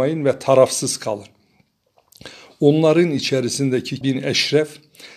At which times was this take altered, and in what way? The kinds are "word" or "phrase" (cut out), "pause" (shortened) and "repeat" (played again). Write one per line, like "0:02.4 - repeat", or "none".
0:04.0 - word